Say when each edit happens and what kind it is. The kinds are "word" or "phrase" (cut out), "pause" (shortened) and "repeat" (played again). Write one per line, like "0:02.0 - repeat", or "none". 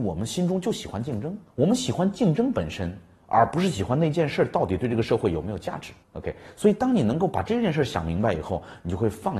0:01.5 - pause
0:06.0 - pause

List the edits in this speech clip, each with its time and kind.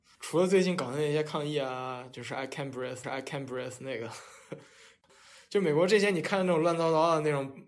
0:03.0 - repeat

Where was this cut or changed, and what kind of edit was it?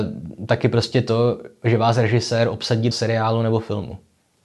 0:02.9 - word

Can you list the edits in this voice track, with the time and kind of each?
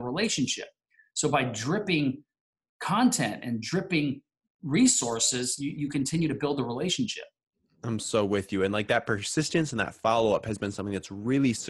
none

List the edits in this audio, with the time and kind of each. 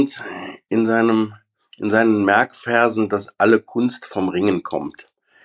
none

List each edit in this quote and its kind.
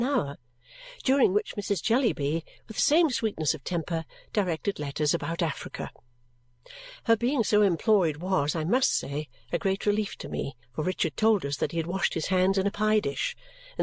0:10.6 - pause

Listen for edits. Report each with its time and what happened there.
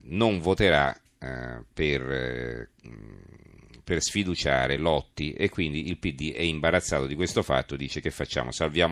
none

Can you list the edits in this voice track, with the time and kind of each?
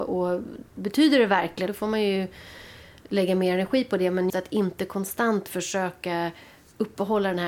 0:01.7 - word
0:04.3 - word

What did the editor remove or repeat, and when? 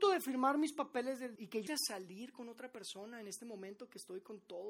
0:01.4 - word
0:01.7 - word

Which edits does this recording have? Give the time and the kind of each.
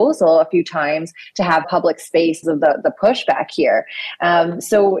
0:01.6 - word
0:02.4 - word

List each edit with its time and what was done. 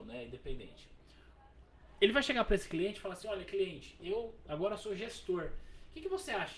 none

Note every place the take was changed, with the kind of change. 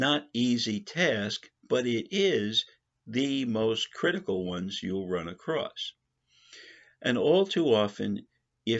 none

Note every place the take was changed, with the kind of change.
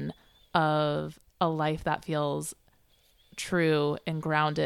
0:01.3 - pause

